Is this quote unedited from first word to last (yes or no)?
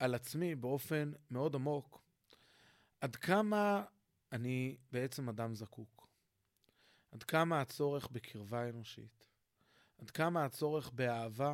yes